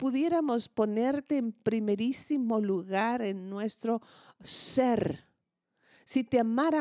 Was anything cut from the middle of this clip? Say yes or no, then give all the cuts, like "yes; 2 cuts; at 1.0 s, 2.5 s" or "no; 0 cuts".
no; 0 cuts